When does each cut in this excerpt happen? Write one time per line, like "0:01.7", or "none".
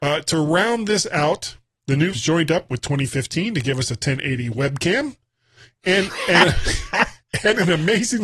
0:02.1